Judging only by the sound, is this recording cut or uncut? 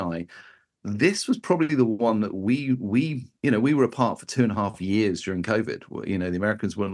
uncut